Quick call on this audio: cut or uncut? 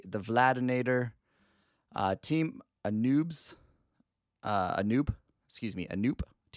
uncut